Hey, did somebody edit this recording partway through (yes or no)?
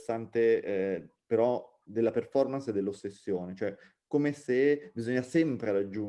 no